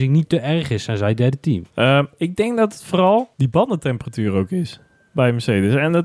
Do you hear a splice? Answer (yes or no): yes